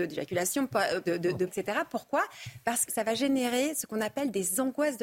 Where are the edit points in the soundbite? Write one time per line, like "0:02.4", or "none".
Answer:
0:01.0
0:01.5
0:02.9